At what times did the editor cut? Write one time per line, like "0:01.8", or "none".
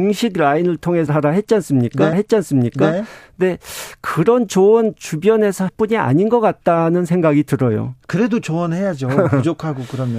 0:01.1
0:02.1
0:05.7